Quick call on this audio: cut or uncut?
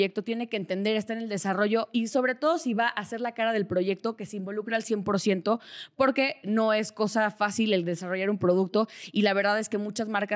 cut